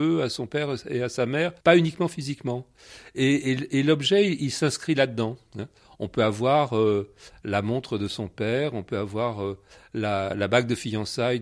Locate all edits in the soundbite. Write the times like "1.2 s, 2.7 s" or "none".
1.6 s